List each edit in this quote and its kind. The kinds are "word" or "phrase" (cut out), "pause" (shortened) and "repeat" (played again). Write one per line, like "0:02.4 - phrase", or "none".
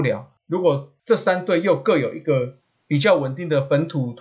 none